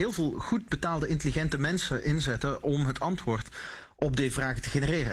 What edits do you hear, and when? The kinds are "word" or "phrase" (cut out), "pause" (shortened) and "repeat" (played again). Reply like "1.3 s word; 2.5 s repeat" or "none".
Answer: none